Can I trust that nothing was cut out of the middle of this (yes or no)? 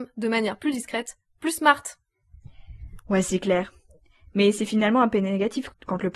yes